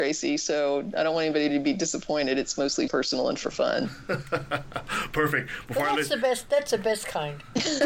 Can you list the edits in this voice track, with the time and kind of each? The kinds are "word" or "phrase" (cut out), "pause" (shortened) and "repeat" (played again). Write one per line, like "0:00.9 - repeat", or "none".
0:02.9 - word